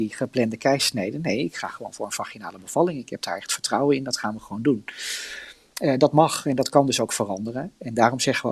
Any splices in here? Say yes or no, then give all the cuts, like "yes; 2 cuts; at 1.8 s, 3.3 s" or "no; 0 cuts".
no; 0 cuts